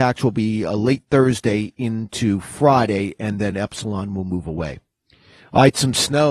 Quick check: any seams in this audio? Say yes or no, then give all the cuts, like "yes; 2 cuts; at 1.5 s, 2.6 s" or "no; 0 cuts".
no; 0 cuts